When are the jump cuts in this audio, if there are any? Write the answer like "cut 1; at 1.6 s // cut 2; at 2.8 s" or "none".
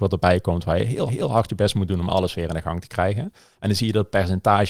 cut 1; at 1.1 s